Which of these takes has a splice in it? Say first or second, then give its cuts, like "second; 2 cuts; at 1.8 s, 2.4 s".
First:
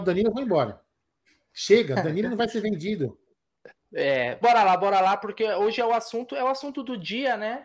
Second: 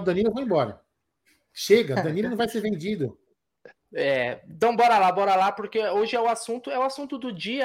first; 1 cut; at 4.4 s